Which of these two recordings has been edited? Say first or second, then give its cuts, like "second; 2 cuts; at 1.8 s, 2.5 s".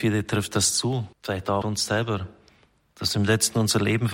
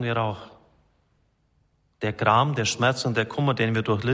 first; 2 cuts; at 1.1 s, 1.6 s